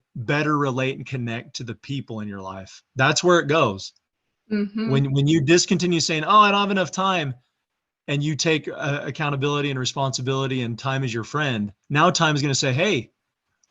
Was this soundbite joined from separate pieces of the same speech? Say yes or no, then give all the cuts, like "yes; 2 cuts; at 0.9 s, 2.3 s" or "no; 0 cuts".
yes; 1 cut; at 11.8 s